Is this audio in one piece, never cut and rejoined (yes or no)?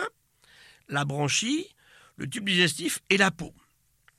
yes